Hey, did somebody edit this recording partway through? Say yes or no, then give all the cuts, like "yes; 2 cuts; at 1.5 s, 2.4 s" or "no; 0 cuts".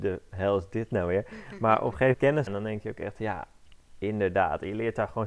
yes; 2 cuts; at 2.1 s, 2.5 s